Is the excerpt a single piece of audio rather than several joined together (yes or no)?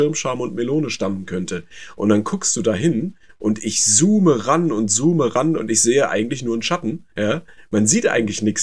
no